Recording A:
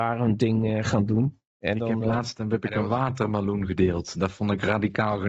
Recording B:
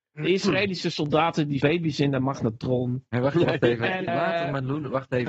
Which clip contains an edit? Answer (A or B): B